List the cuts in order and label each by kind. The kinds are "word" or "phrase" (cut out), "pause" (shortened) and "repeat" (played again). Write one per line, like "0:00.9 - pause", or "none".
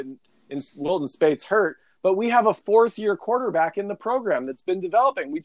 none